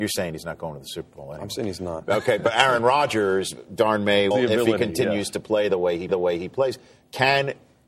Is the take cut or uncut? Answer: cut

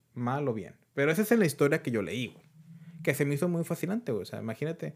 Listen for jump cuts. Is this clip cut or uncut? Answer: uncut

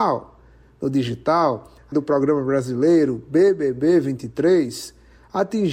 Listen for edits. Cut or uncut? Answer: cut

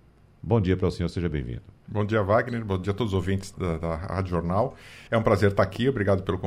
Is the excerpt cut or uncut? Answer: cut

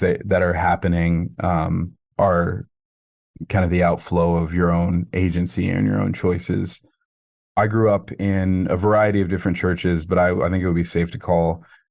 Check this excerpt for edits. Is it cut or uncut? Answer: cut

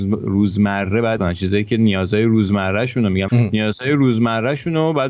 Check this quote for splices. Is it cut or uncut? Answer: cut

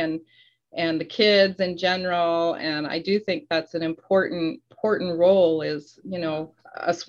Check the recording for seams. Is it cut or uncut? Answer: uncut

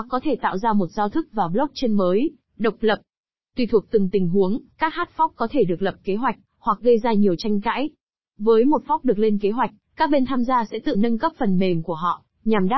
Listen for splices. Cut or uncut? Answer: cut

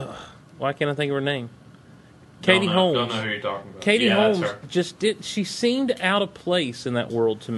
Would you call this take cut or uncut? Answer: uncut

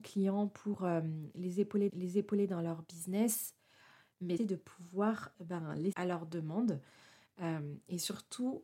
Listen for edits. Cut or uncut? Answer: cut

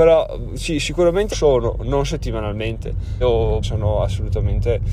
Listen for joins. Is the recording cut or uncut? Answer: cut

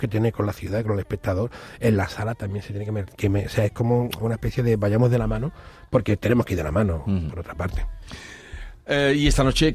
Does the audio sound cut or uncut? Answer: uncut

